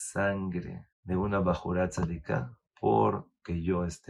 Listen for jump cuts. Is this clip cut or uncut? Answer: cut